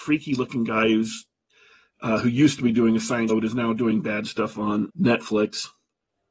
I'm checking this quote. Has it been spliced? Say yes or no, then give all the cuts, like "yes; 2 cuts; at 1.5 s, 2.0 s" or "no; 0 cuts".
yes; 2 cuts; at 3.3 s, 4.9 s